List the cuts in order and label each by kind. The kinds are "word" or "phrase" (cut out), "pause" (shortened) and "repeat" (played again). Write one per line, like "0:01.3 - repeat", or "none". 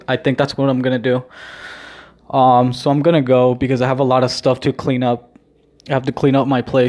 none